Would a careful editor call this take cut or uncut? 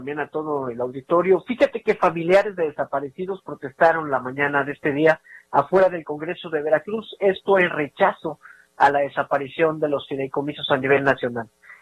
uncut